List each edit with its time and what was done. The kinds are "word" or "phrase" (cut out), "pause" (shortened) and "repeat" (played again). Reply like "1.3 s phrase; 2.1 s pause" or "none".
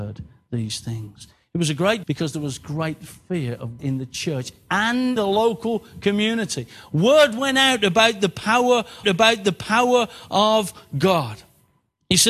2.0 s word; 3.8 s word; 5.2 s word; 9.0 s repeat

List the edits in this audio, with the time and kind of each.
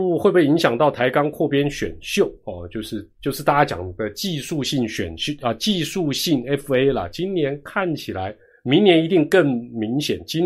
none

